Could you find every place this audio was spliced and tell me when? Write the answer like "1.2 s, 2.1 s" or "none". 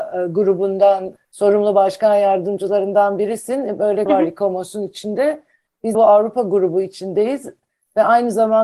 4.1 s, 5.9 s